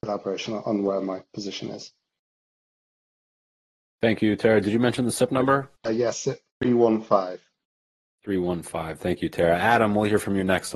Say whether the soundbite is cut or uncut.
cut